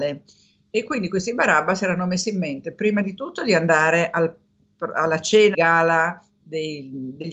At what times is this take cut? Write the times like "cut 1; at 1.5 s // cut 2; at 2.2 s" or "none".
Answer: cut 1; at 5.5 s